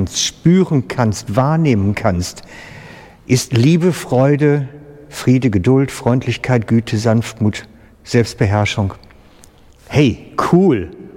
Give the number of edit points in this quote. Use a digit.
0